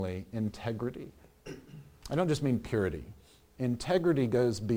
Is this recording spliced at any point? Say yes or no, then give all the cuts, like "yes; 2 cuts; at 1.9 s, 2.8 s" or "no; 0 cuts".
no; 0 cuts